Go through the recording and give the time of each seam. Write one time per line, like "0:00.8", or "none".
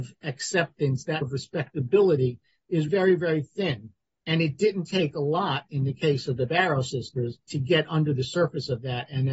0:01.2
0:02.9
0:07.5